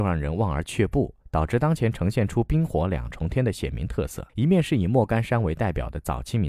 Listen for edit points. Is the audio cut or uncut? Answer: cut